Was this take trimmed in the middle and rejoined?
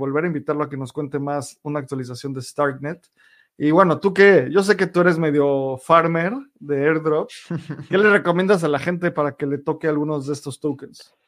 no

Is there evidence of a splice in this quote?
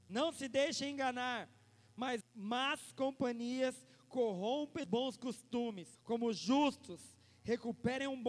yes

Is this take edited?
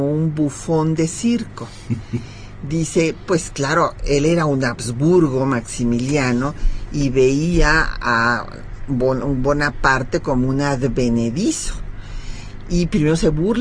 no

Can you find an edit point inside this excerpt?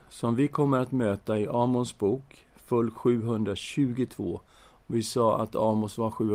no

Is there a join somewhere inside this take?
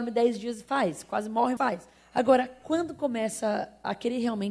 yes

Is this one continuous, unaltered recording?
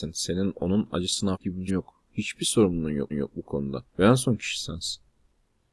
no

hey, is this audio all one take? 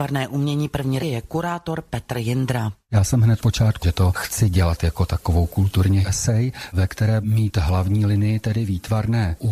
no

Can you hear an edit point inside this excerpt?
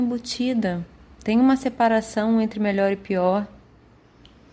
no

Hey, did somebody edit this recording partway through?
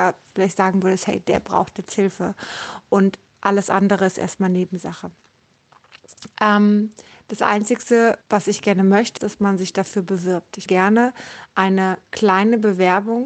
yes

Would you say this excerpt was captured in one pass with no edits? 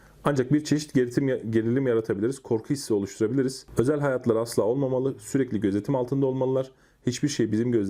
yes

